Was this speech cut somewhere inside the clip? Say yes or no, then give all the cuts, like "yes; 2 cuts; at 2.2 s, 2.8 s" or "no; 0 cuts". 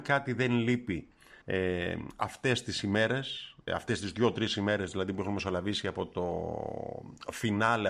yes; 2 cuts; at 1.4 s, 3.7 s